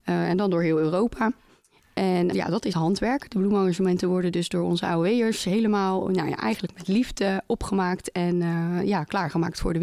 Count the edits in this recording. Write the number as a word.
two